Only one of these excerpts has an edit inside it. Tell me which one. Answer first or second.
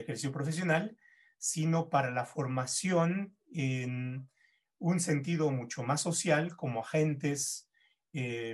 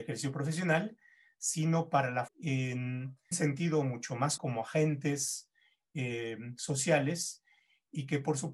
second